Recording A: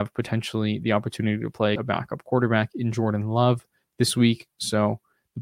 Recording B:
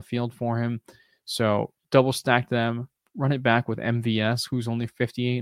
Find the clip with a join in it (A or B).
A